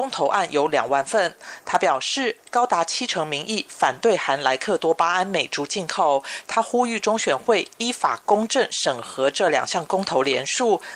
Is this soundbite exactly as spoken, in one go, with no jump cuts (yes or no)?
yes